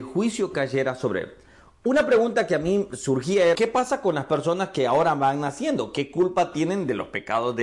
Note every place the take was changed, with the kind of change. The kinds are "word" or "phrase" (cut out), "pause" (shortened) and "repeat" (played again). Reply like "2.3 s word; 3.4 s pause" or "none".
3.6 s word

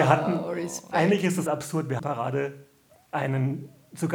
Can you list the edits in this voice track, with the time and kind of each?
1.5 s word; 2.0 s phrase

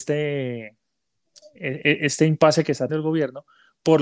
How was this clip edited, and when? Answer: 2.9 s word

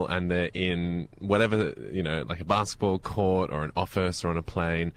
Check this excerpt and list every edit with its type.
1.1 s pause

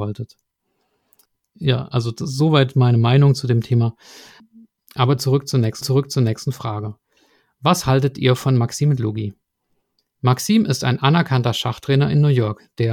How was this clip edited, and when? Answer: 5.8 s repeat

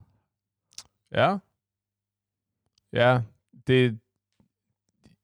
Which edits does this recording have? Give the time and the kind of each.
none

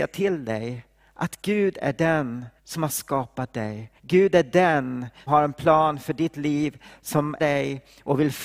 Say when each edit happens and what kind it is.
2.6 s pause; 4.0 s pause; 5.3 s word; 7.4 s word

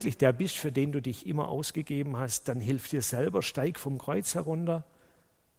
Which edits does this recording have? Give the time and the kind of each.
none

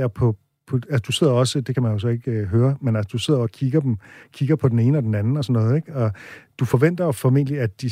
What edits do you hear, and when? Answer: none

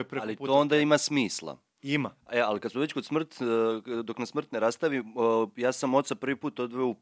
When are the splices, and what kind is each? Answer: none

